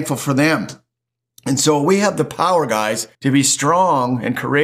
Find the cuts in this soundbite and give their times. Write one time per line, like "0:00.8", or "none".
0:03.1